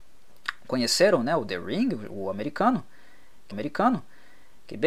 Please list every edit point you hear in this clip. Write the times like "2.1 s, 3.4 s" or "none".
3.5 s